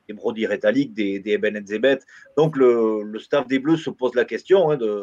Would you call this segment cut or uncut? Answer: uncut